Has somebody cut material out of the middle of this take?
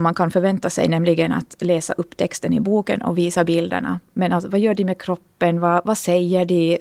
no; 0 cuts

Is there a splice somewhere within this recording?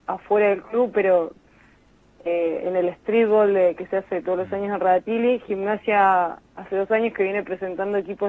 no; 0 cuts

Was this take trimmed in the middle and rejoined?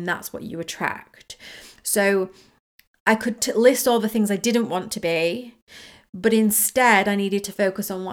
no; 0 cuts

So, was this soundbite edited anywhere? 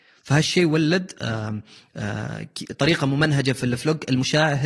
no; 0 cuts

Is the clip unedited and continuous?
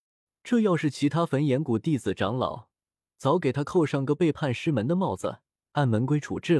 yes; 0 cuts

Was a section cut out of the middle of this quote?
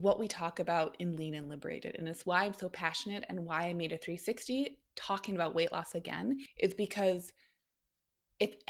no; 0 cuts

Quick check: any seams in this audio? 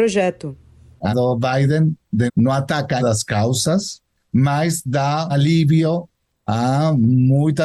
yes; 4 cuts; at 1.1 s, 2.3 s, 3.0 s, 5.3 s

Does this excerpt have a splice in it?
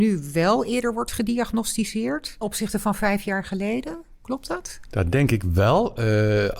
yes; 1 cut; at 2.4 s

